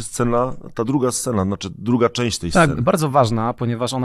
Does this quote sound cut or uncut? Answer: uncut